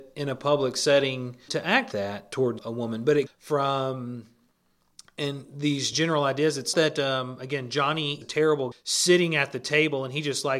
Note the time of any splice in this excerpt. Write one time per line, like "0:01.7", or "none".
0:01.5
0:01.9
0:02.6
0:03.3
0:05.9
0:06.7
0:08.2
0:08.7